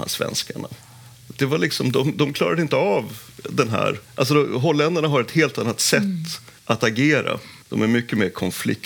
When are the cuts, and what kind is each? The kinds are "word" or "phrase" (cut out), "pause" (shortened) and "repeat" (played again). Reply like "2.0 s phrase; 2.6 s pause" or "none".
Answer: 4.0 s pause; 6.6 s pause; 7.6 s pause